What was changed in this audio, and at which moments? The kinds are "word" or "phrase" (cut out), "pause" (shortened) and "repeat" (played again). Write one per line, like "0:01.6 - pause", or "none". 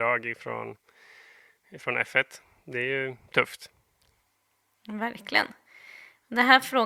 none